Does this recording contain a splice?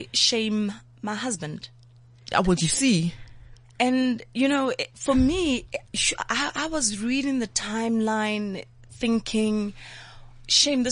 no; 0 cuts

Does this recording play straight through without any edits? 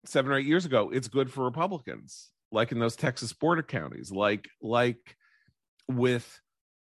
yes; 0 cuts

